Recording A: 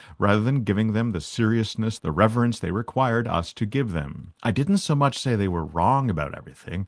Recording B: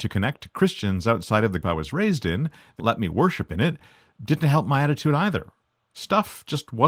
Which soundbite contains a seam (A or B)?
B